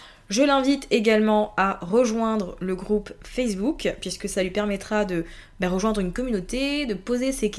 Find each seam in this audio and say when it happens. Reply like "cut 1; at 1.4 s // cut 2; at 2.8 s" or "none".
none

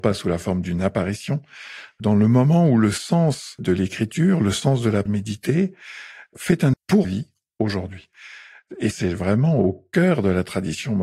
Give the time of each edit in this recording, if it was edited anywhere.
cut 1; at 2.0 s // cut 2; at 3.6 s // cut 3; at 5.1 s // cut 4; at 6.3 s // cut 5; at 6.7 s // cut 6; at 7.0 s // cut 7; at 8.9 s

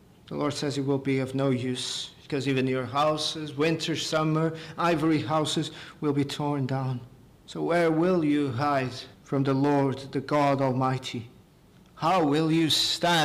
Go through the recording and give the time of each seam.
cut 1; at 7.3 s // cut 2; at 9.1 s // cut 3; at 11.4 s

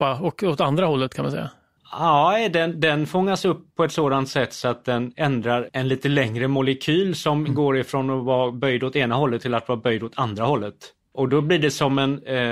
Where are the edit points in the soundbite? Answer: cut 1; at 1.8 s // cut 2; at 3.7 s // cut 3; at 11.3 s

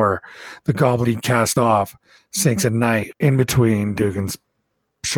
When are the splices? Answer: cut 1; at 1.0 s

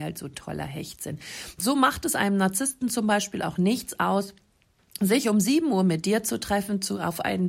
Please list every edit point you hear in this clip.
none

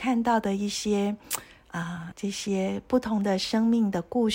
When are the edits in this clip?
cut 1; at 2.1 s

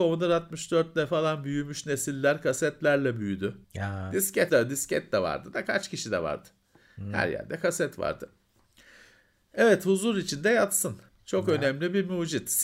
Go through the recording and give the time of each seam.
cut 1; at 3.6 s // cut 2; at 4.5 s // cut 3; at 11.1 s

